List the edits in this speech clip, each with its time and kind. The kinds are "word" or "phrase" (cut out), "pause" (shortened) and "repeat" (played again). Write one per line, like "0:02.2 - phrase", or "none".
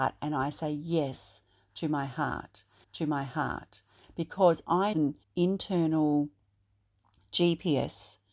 0:02.8 - repeat
0:04.9 - phrase
0:05.2 - pause